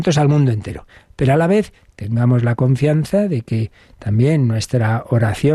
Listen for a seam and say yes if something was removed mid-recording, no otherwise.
no